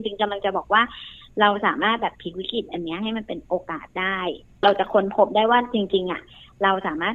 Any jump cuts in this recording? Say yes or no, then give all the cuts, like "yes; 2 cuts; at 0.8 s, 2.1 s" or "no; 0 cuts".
no; 0 cuts